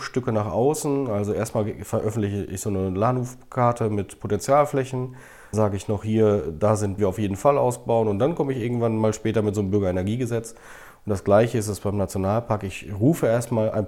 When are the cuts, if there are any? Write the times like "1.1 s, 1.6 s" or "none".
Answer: 5.5 s, 7.0 s